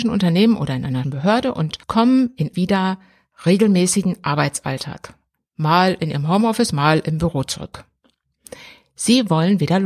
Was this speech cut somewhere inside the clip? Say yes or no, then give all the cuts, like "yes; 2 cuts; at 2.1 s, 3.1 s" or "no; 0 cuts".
yes; 3 cuts; at 1.0 s, 1.8 s, 2.5 s